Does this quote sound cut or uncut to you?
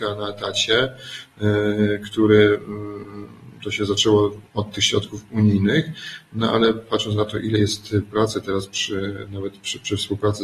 cut